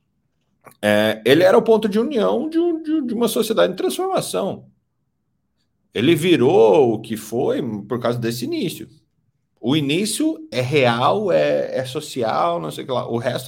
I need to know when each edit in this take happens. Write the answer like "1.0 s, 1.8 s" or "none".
10.5 s